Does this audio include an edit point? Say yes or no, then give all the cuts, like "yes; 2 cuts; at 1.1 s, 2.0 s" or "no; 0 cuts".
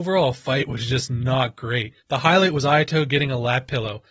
yes; 1 cut; at 2.0 s